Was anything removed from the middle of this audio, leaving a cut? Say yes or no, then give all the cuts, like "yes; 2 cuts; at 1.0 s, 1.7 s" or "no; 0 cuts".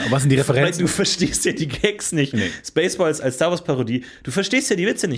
no; 0 cuts